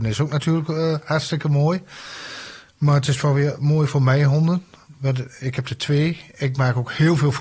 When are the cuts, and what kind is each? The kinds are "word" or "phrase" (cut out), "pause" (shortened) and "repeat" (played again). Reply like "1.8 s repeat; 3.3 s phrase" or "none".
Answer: none